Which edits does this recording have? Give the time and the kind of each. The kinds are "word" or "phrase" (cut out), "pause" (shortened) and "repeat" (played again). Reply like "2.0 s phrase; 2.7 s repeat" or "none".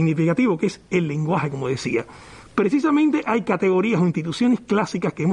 none